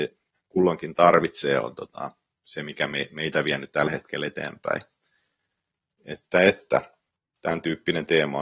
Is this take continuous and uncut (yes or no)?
yes